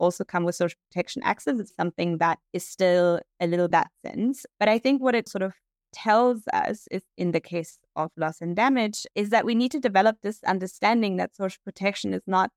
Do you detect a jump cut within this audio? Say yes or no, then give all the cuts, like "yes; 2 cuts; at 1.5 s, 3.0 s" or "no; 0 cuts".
yes; 6 cuts; at 1.7 s, 2.4 s, 3.7 s, 5.3 s, 7.1 s, 9.1 s